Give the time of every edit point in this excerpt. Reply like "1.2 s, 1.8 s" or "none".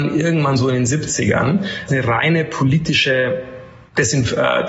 1.9 s